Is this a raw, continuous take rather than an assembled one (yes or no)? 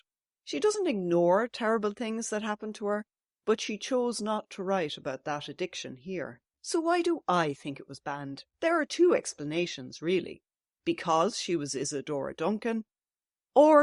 no